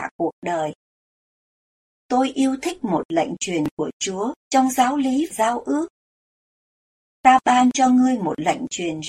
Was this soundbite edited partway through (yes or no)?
yes